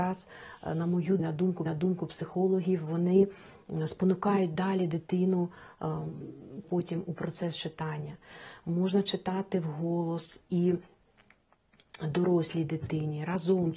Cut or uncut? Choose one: cut